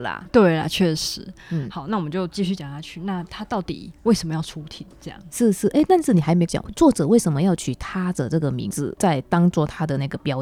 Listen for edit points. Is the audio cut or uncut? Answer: uncut